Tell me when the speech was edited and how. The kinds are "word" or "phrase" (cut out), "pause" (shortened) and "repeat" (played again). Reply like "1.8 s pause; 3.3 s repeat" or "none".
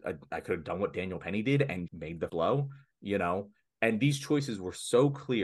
1.9 s word; 2.3 s word